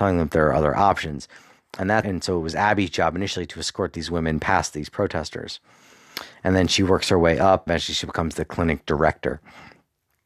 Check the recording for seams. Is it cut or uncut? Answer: cut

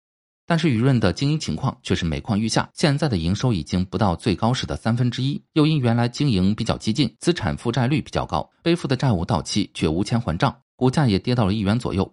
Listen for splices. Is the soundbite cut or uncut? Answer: cut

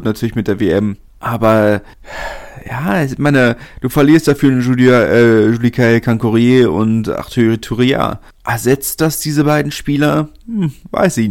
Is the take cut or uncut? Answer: uncut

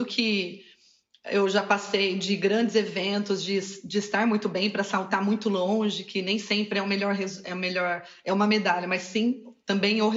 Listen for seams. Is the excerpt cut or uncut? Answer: uncut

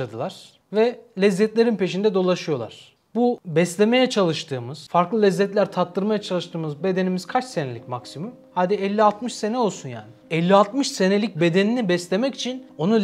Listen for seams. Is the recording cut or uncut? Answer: uncut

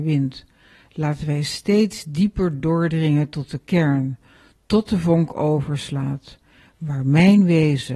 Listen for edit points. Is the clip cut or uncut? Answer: uncut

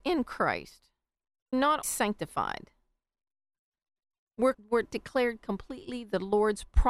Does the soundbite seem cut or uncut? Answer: cut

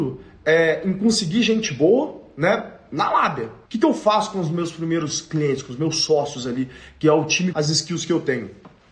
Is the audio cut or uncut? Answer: cut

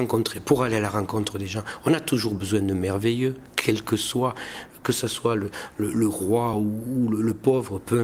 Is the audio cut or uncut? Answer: uncut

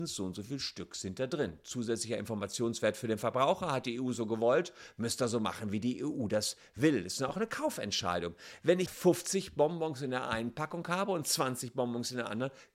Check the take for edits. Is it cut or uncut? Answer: cut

